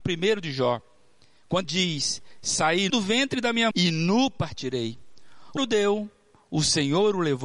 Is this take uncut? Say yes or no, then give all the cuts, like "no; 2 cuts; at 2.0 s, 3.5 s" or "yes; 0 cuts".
no; 4 cuts; at 1.6 s, 2.9 s, 3.7 s, 5.6 s